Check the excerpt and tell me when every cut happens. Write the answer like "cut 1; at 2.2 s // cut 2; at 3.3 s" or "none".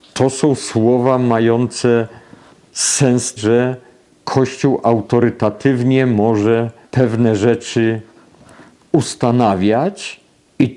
cut 1; at 3.4 s // cut 2; at 6.8 s